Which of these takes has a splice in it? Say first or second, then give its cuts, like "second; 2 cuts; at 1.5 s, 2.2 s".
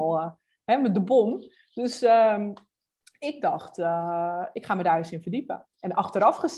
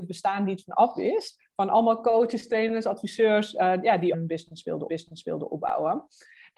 second; 2 cuts; at 4.1 s, 4.9 s